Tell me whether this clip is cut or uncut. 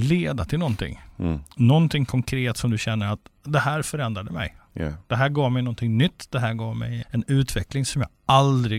cut